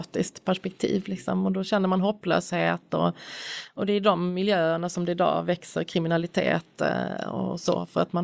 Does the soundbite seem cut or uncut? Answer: uncut